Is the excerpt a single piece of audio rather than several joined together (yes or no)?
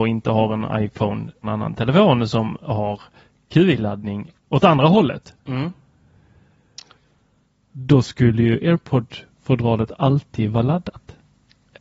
no